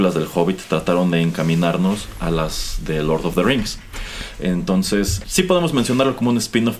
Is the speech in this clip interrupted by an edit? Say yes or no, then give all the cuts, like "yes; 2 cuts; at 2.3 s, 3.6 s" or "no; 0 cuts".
yes; 1 cut; at 5.2 s